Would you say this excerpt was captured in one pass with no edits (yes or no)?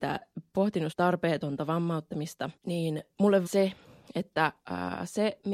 no